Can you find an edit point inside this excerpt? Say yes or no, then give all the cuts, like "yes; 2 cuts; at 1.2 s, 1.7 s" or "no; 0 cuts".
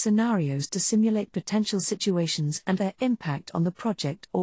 yes; 1 cut; at 2.8 s